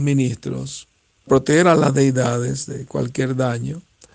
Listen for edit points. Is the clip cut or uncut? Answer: cut